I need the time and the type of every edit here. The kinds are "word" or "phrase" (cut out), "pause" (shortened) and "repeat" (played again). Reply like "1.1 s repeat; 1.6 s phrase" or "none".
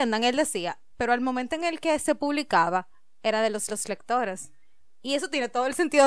0.9 s phrase; 3.7 s repeat